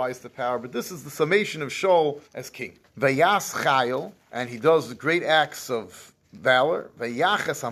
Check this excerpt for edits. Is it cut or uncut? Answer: cut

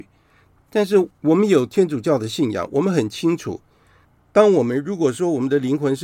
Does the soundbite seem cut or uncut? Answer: uncut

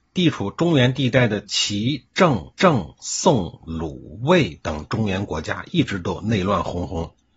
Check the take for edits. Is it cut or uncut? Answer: cut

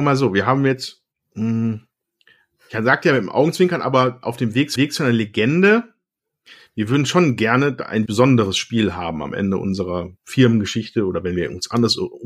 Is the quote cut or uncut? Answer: cut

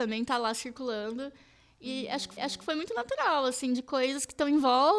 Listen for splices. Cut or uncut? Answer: cut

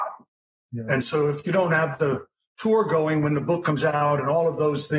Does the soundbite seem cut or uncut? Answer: uncut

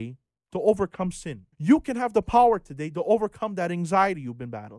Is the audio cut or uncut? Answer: cut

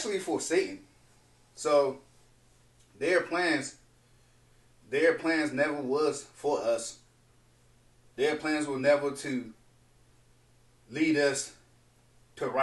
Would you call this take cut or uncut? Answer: uncut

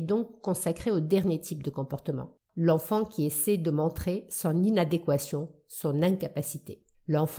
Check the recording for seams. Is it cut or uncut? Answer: uncut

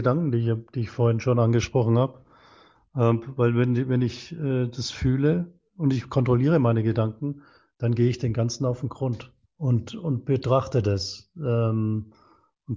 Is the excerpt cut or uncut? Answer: cut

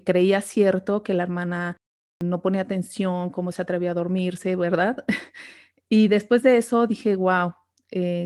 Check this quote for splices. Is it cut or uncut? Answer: uncut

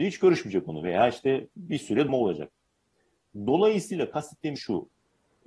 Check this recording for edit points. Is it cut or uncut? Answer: cut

